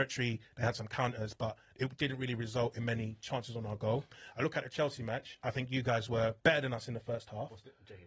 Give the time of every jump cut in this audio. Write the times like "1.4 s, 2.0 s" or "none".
6.4 s